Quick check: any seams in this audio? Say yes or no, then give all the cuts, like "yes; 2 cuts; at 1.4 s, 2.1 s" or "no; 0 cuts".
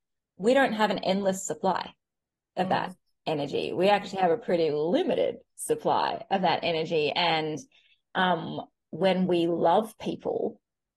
no; 0 cuts